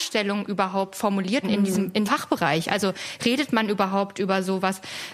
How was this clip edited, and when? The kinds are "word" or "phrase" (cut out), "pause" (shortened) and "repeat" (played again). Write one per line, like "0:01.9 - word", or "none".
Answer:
0:01.4 - word
0:02.1 - word